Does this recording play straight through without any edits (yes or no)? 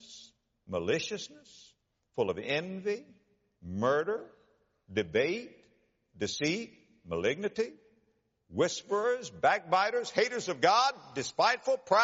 yes